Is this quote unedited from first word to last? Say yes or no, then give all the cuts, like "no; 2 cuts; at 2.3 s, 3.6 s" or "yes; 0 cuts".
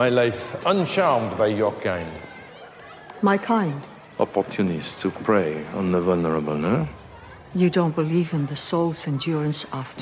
yes; 0 cuts